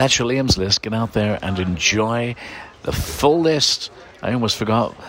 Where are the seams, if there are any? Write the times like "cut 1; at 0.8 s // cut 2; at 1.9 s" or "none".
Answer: none